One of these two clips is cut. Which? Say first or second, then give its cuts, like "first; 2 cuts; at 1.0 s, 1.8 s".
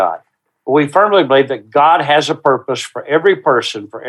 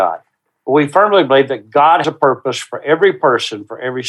second; 1 cut; at 2.0 s